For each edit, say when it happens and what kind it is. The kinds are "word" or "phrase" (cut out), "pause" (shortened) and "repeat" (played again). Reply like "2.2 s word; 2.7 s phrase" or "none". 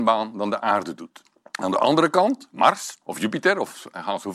1.3 s pause; 3.0 s pause